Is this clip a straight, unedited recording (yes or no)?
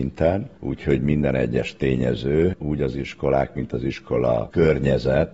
yes